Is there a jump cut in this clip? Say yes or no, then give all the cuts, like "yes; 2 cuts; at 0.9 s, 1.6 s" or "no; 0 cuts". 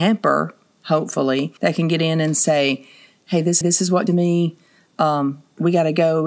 yes; 3 cuts; at 1.6 s, 3.6 s, 4.1 s